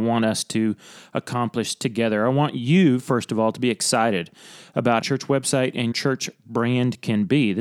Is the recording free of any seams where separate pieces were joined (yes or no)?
no